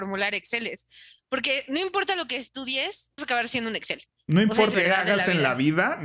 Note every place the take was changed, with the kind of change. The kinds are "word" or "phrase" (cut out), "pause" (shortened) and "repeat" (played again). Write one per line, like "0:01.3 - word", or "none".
0:03.2 - word
0:04.7 - word